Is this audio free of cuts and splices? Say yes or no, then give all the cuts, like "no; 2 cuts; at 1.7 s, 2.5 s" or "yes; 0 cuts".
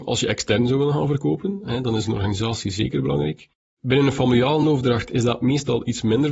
yes; 0 cuts